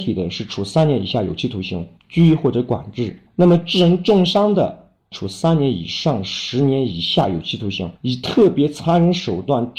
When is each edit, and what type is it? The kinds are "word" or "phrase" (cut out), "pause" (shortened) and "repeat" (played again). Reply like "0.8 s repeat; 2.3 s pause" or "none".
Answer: 3.3 s pause; 8.0 s pause